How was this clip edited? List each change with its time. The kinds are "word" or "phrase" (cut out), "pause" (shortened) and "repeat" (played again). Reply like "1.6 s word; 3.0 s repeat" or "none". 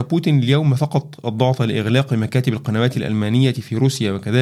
none

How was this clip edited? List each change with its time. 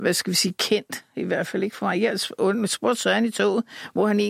none

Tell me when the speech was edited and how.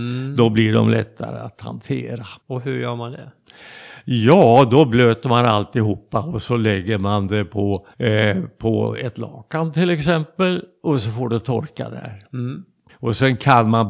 2.4 s pause; 7.9 s pause; 12.9 s pause

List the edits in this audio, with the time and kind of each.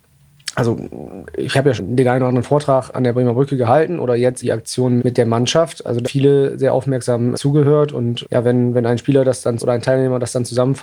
1.8 s word; 2.9 s word; 4.4 s word; 5.0 s word; 6.0 s word; 7.3 s word; 8.2 s word; 9.6 s word

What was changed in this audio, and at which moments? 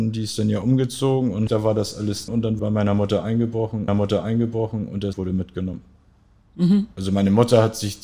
1.5 s phrase; 2.3 s word; 2.6 s word; 3.9 s repeat; 5.1 s word

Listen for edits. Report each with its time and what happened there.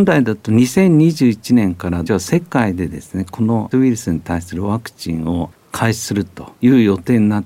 2.1 s word; 3.7 s word

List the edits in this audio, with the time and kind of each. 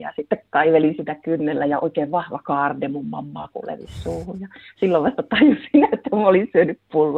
none

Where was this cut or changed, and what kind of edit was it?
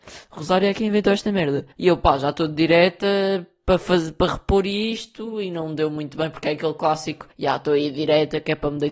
1.7 s pause; 7.3 s pause

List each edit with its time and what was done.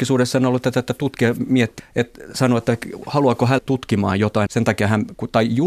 1.8 s word; 3.6 s word; 4.5 s word

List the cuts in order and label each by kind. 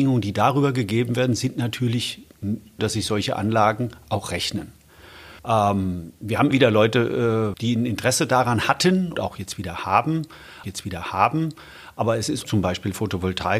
2.8 s phrase; 5.4 s pause; 6.5 s word; 7.5 s word; 9.1 s word; 10.6 s repeat; 12.4 s phrase

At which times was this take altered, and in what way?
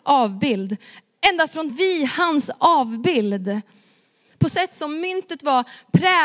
1.7 s phrase; 4.5 s word

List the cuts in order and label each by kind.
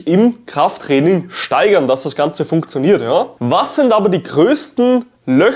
none

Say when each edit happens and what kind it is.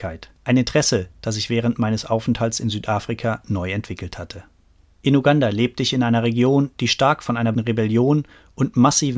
7.5 s word

